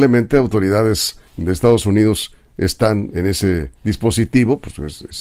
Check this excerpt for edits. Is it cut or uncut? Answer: cut